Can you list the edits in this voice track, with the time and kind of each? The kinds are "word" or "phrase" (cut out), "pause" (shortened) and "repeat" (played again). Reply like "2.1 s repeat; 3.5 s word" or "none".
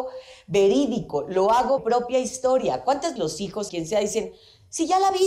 1.8 s word; 3.2 s word; 3.7 s word